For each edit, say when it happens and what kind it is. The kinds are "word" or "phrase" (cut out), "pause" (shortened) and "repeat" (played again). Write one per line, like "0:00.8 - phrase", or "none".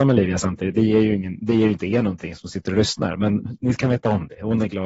none